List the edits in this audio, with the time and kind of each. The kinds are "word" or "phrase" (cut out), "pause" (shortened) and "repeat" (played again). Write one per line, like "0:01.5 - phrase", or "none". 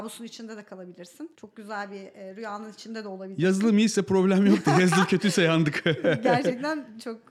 0:01.3 - pause